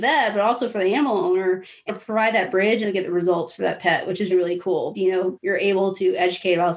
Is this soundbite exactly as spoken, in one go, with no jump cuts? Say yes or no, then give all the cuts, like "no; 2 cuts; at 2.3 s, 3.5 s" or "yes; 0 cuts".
no; 5 cuts; at 1.9 s, 2.8 s, 4.3 s, 4.9 s, 5.4 s